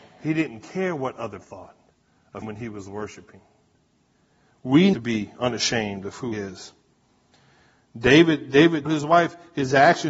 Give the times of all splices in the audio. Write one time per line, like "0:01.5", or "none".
0:01.4
0:02.4
0:04.9
0:06.3
0:08.9